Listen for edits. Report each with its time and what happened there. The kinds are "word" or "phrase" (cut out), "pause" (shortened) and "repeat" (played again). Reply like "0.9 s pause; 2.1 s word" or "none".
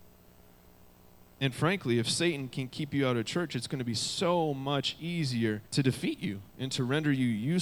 5.7 s pause; 6.5 s pause